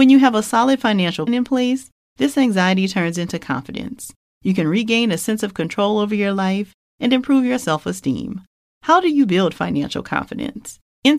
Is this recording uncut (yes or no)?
no